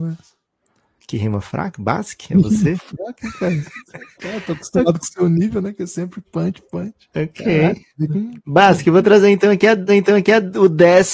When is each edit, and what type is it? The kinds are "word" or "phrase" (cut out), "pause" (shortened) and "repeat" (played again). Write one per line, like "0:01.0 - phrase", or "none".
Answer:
0:06.3 - word
0:07.1 - pause
0:09.9 - repeat

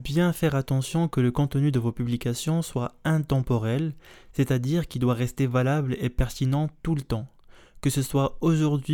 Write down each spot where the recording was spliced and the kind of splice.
none

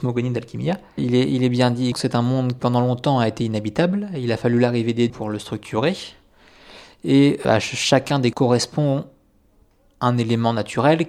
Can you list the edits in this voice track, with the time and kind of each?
0:01.0 - word
0:01.9 - word
0:02.6 - word
0:05.1 - word
0:07.4 - word
0:08.3 - word

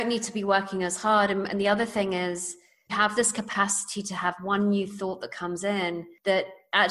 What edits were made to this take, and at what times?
0:02.9 - phrase

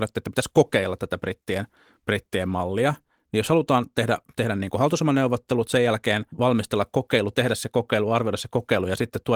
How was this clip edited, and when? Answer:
0:06.3 - pause

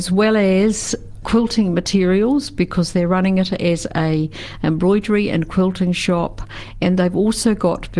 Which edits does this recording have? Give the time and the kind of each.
0:01.2 - word

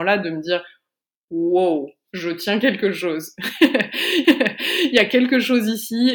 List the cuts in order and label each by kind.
0:04.2 - repeat

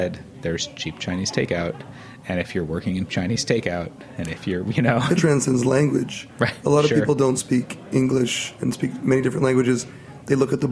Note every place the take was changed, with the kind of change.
0:03.1 - phrase
0:05.2 - word

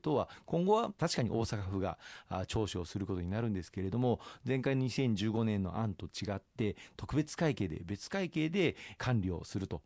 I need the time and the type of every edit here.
0:01.0 - phrase

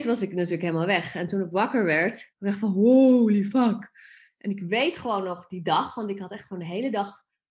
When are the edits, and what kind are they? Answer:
0:02.3 - pause

